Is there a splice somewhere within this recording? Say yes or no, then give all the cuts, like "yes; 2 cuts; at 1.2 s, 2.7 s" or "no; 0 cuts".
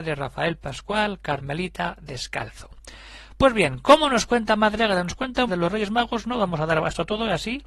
yes; 1 cut; at 5.5 s